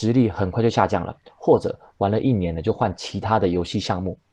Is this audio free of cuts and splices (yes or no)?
yes